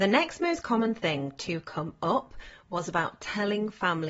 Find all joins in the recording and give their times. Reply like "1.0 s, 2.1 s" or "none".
none